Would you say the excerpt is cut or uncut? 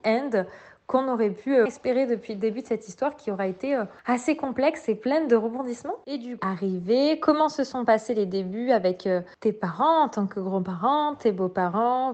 cut